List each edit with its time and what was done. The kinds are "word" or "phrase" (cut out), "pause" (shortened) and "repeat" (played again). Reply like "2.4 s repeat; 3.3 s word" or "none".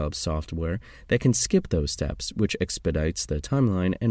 none